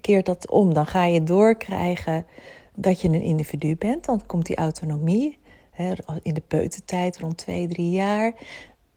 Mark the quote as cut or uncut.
cut